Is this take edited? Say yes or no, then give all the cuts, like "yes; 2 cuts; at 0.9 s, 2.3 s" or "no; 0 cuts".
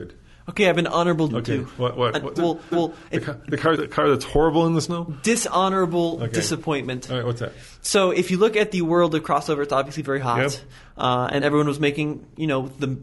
yes; 5 cuts; at 1.3 s, 2.4 s, 2.7 s, 3.8 s, 11.4 s